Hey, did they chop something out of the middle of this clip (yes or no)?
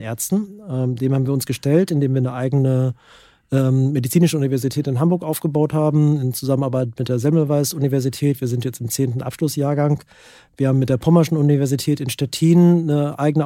no